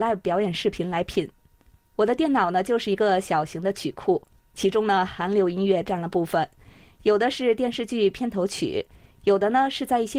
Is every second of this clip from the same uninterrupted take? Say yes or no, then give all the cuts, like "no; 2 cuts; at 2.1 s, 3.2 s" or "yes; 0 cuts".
yes; 0 cuts